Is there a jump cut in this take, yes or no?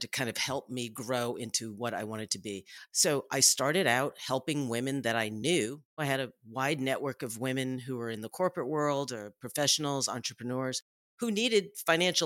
no